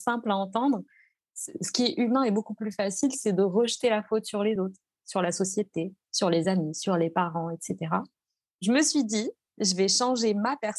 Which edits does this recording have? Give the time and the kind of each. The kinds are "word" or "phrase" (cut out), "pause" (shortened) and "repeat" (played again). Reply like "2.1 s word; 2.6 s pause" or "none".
none